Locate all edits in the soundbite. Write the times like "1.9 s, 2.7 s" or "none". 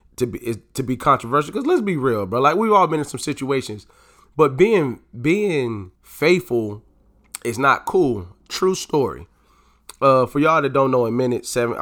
6.0 s

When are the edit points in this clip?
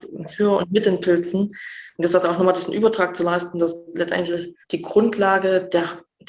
1.9 s, 4.6 s

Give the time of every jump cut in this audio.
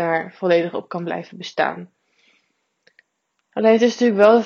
none

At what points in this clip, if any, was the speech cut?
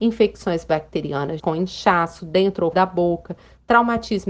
1.4 s, 2.7 s

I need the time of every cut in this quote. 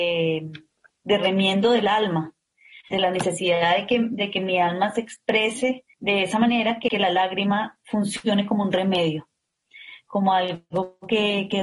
2.9 s, 5.9 s, 6.9 s

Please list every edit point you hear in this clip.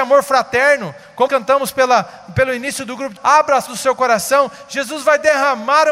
1.3 s, 3.2 s, 3.7 s

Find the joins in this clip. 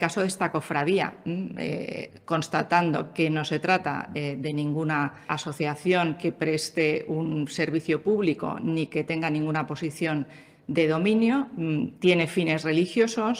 5.3 s

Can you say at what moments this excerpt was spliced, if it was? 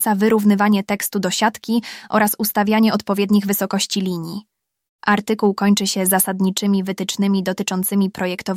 none

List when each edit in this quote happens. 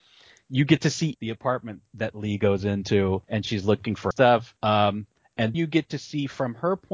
1.1 s, 1.9 s, 3.2 s, 4.1 s, 4.6 s, 5.5 s

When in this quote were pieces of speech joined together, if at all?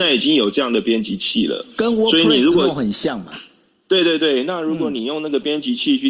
none

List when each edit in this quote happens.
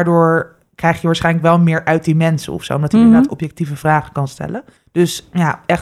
4.8 s

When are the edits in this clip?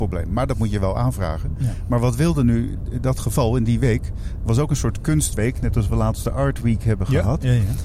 none

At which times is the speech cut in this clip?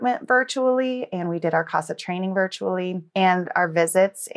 3.1 s

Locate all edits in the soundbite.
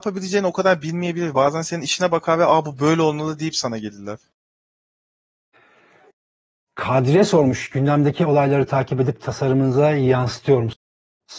none

